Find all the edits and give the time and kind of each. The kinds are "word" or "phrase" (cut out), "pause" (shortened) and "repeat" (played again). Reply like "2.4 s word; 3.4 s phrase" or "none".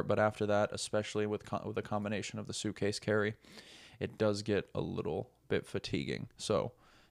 none